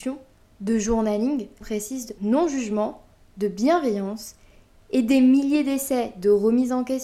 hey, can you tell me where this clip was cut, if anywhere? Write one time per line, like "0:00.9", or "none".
0:01.6
0:02.2